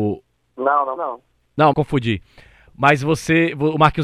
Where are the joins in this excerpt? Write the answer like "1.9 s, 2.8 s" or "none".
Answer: 1.0 s, 1.7 s